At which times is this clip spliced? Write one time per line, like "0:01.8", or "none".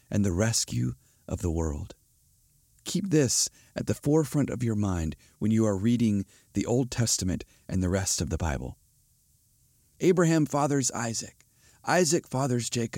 none